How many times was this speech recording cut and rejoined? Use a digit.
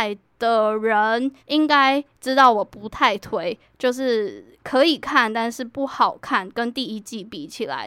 1